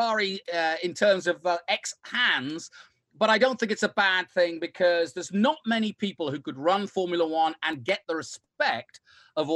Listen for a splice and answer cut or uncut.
uncut